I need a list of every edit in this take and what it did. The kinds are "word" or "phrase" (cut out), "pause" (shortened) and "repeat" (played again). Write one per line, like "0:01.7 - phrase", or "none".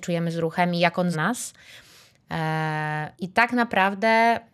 0:01.1 - word
0:03.1 - pause